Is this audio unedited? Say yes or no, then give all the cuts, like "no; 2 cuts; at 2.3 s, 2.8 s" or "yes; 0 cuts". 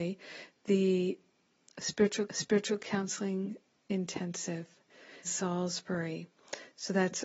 no; 2 cuts; at 2.3 s, 5.2 s